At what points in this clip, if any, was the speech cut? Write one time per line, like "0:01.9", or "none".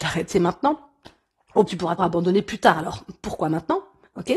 0:01.7
0:02.0